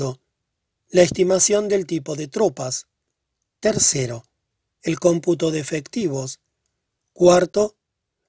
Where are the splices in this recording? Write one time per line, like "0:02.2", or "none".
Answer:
none